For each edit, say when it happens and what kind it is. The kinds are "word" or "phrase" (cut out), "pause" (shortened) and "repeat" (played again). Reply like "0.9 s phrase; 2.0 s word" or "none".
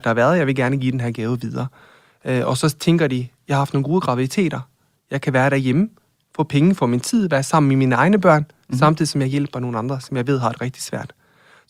none